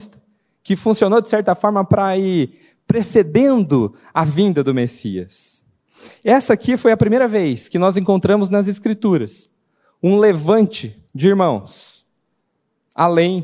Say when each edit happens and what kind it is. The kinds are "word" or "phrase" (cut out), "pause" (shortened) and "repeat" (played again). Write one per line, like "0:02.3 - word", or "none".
0:11.1 - pause